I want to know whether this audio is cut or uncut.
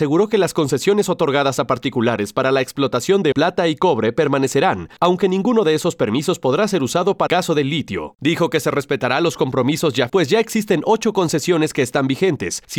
cut